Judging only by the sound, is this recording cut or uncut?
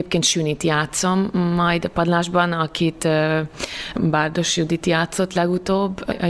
uncut